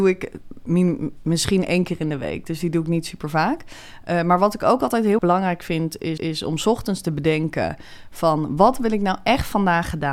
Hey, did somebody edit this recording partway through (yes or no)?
yes